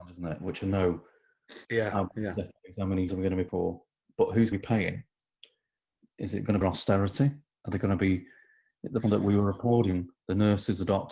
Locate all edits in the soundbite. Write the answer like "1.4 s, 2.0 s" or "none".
1.6 s, 3.1 s, 3.5 s, 4.5 s, 6.6 s, 9.0 s

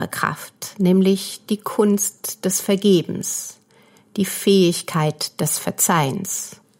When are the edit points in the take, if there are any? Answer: none

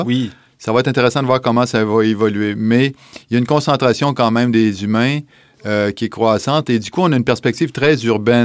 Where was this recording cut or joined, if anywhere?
none

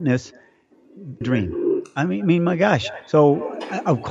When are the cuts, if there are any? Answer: 1.2 s

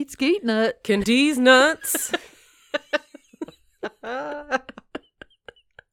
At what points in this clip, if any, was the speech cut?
1.0 s

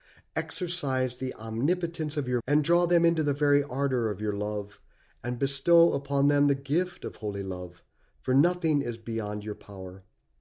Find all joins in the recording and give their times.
2.4 s

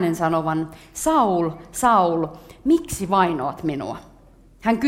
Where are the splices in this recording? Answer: none

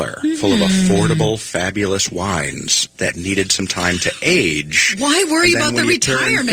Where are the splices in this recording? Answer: none

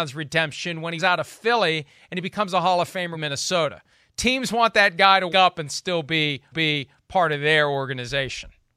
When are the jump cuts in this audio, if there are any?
1.0 s, 3.1 s, 5.3 s, 6.5 s

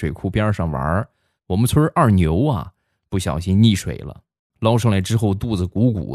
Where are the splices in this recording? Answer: none

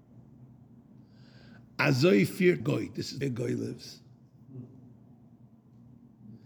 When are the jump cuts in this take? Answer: 2.6 s, 3.2 s

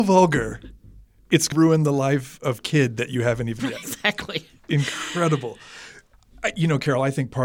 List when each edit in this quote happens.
1.5 s, 2.6 s, 3.6 s

